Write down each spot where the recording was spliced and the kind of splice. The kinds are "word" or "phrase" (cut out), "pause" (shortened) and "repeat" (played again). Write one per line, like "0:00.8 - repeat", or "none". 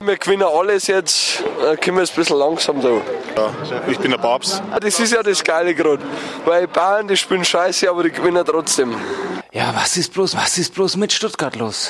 0:10.3 - repeat